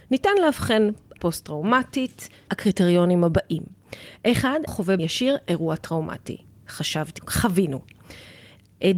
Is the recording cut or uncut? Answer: cut